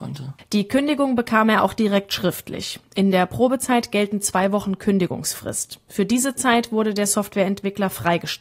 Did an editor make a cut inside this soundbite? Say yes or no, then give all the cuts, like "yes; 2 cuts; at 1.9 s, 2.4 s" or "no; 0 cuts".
no; 0 cuts